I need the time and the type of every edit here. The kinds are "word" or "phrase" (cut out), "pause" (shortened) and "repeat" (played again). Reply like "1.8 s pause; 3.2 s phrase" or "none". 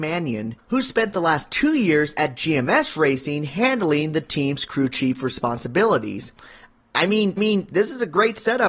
7.4 s repeat